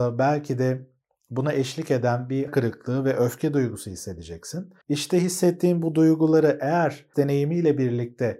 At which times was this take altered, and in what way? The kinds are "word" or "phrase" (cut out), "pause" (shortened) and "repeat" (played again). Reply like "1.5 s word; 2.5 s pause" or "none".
2.5 s word; 4.8 s pause; 7.1 s word